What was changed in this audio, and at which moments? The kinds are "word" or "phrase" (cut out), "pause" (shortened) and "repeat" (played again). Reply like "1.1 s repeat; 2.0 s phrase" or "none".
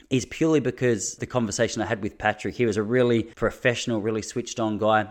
1.2 s word; 3.3 s pause